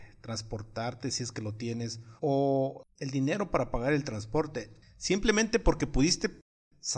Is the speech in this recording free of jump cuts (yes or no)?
no